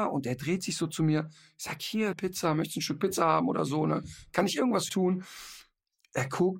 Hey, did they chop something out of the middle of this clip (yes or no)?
yes